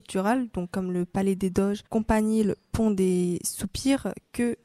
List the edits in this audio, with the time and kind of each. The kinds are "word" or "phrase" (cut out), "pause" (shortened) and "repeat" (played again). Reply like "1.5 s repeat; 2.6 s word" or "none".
1.9 s pause